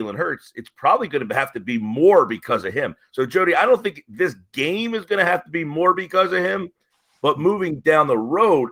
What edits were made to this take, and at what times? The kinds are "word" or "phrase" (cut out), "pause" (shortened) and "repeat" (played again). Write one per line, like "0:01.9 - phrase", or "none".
none